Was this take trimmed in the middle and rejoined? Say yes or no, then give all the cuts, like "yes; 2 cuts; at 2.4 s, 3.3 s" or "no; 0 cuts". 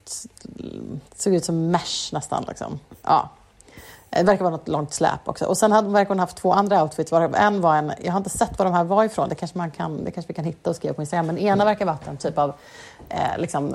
yes; 2 cuts; at 1.1 s, 3.0 s